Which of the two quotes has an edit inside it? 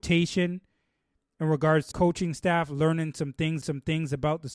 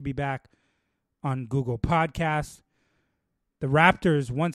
first; 2 cuts; at 1.9 s, 3.6 s

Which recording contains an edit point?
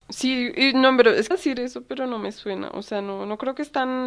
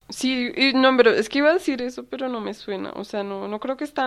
first; 1 cut; at 1.3 s

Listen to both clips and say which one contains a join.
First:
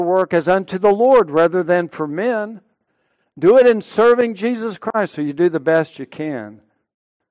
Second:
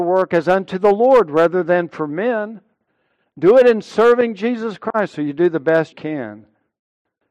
second; 1 cut; at 5.9 s

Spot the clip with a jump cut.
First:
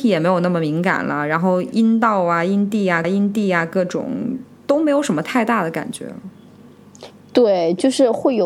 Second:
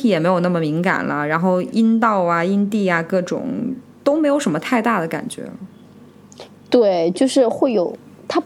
first; 1 cut; at 3.0 s

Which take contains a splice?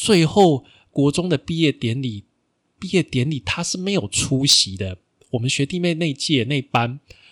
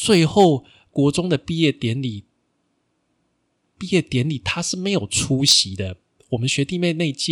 first; 1 cut; at 2.5 s

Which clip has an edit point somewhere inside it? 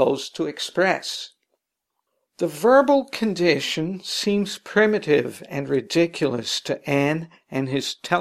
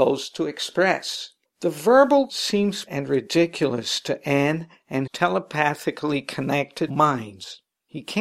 second; 5 cuts; at 1.4 s, 2.3 s, 2.9 s, 5.1 s, 6.9 s

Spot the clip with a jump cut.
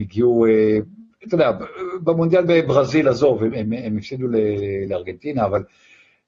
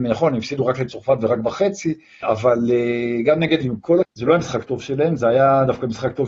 second; 3 cuts; at 2.2 s, 3.6 s, 4.0 s

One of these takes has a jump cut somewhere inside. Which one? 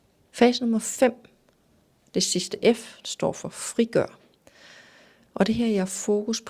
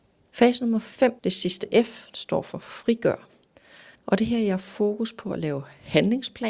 second; 2 cuts; at 1.2 s, 3.9 s

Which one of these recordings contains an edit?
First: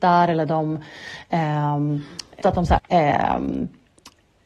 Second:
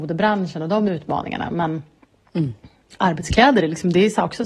first; 2 cuts; at 2.4 s, 2.8 s

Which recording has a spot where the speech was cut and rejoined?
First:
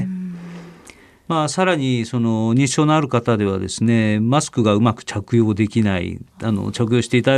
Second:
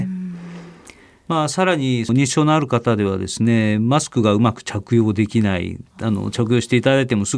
second; 1 cut; at 2.1 s

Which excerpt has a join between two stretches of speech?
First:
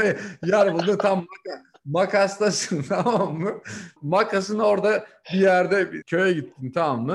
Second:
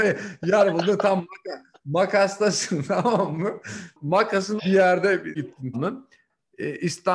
second; 3 cuts; at 4.6 s, 5.4 s, 5.7 s

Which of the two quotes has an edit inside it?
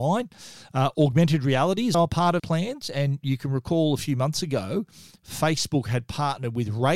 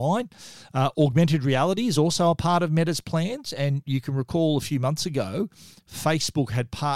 first; 2 cuts; at 1.9 s, 2.4 s

